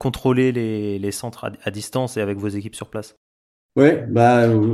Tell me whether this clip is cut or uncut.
uncut